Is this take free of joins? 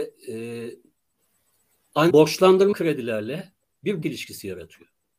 no; 3 cuts; at 2.1 s, 2.7 s, 4.0 s

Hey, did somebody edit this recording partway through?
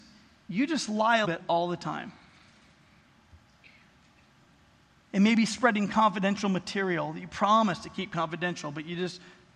yes; 1 cut; at 1.2 s

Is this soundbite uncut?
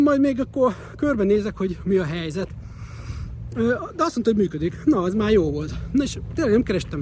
yes; 0 cuts

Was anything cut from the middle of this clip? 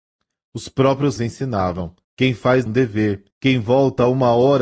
yes; 4 cuts; at 1.2 s, 2.0 s, 2.7 s, 3.3 s

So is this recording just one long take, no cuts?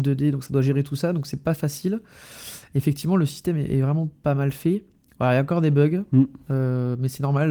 yes; 0 cuts

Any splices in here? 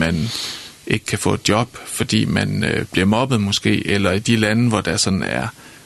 no; 0 cuts

